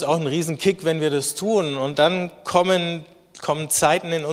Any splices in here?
no; 0 cuts

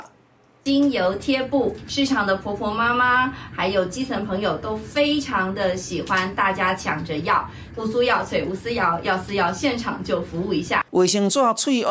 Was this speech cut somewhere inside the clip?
yes; 2 cuts; at 7.7 s, 10.9 s

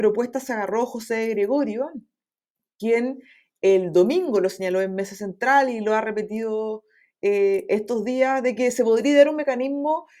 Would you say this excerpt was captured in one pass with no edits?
yes; 0 cuts

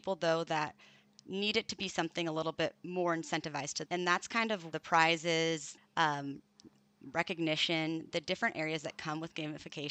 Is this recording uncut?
no; 4 cuts; at 2.8 s, 3.9 s, 4.7 s, 5.8 s

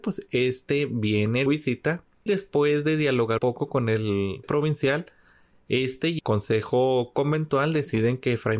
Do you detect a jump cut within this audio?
yes; 5 cuts; at 1.5 s, 2.3 s, 3.4 s, 4.4 s, 6.2 s

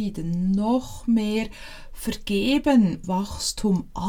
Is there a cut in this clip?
yes; 1 cut; at 3.0 s

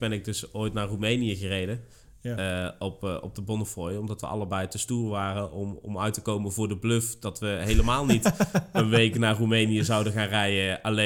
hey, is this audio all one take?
yes; 0 cuts

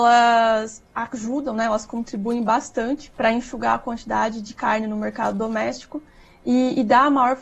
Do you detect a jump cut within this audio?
yes; 1 cut; at 3.1 s

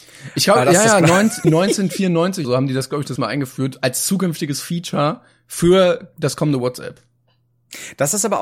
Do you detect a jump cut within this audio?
yes; 3 cuts; at 1.4 s, 2.4 s, 3.2 s

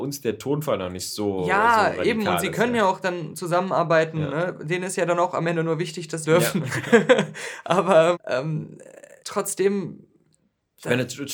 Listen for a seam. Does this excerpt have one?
yes; 3 cuts; at 6.2 s, 8.1 s, 9.2 s

